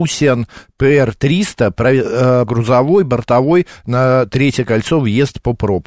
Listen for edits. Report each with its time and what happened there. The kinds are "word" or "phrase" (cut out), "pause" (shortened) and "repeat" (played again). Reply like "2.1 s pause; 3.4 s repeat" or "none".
2.5 s word